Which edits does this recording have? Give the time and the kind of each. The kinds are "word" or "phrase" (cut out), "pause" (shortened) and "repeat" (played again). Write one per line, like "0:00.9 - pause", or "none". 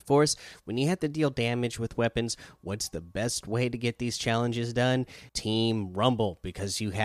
0:05.3 - pause